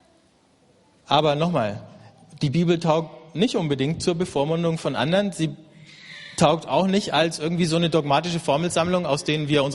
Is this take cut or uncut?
uncut